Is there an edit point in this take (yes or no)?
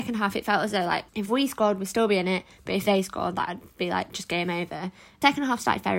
no